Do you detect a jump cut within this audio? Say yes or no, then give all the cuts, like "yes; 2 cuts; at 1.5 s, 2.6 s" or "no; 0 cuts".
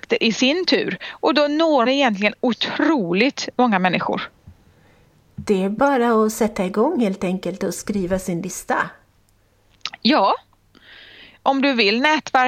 yes; 1 cut; at 1.9 s